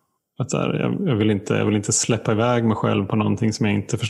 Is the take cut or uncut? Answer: uncut